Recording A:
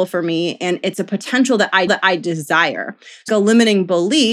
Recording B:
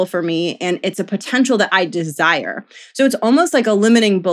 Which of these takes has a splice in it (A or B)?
A